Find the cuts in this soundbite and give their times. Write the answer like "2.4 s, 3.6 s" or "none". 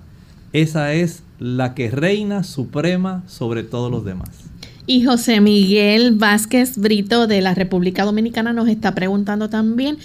none